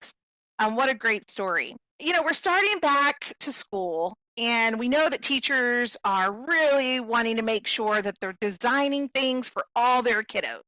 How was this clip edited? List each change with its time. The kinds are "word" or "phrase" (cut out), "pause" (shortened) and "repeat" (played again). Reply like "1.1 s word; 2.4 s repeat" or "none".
none